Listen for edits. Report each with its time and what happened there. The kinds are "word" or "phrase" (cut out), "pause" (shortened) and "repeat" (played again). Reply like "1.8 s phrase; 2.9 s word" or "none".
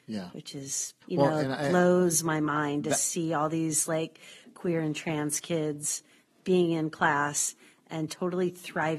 1.0 s pause